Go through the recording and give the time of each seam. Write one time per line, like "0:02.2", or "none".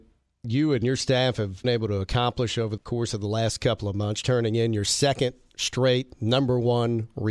0:01.6
0:02.8
0:04.2